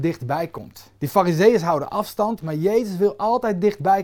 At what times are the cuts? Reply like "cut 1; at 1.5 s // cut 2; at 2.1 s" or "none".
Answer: cut 1; at 1.0 s